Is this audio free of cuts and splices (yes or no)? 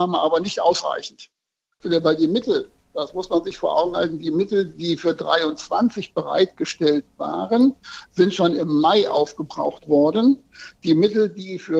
yes